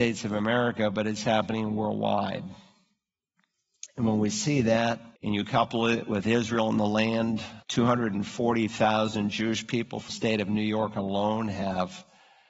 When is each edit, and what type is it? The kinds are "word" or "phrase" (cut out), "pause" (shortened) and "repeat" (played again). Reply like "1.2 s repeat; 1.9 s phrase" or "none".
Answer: 5.2 s pause; 7.6 s pause; 10.1 s word